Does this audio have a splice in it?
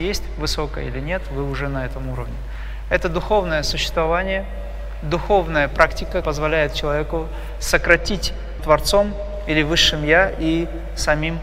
yes; 2 cuts; at 6.2 s, 8.6 s

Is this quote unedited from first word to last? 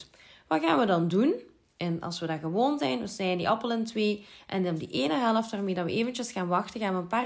yes; 0 cuts

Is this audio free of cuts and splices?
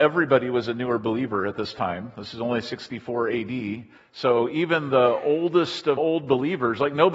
no; 2 cuts; at 4.0 s, 6.0 s

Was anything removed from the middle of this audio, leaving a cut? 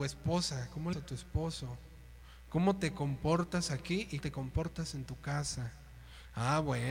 yes; 2 cuts; at 0.9 s, 4.2 s

